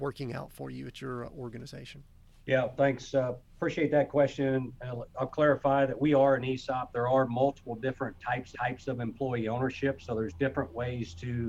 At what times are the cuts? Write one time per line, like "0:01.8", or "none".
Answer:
0:08.5